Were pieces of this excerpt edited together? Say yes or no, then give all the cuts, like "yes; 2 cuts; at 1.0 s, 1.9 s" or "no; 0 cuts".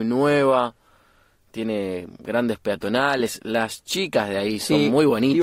no; 0 cuts